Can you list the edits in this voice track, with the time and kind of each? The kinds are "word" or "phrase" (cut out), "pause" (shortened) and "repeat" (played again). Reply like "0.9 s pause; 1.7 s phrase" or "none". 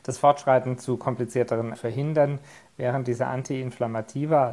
1.8 s phrase